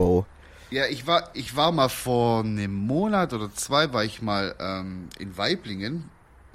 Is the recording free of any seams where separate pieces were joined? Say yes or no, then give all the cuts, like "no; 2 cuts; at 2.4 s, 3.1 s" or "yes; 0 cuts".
yes; 0 cuts